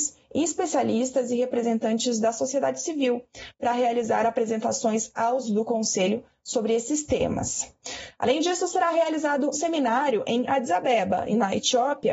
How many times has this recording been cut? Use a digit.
2